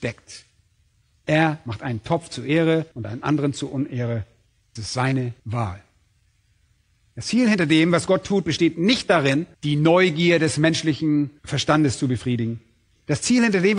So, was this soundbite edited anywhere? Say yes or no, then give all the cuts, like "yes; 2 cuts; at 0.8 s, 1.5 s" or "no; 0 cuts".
yes; 5 cuts; at 2.9 s, 4.8 s, 5.4 s, 9.5 s, 11.4 s